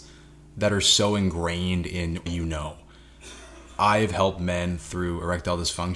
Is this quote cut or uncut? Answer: cut